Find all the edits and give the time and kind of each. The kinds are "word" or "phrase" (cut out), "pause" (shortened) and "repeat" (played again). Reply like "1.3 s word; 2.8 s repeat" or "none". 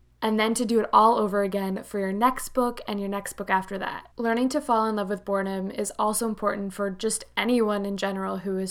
4.1 s pause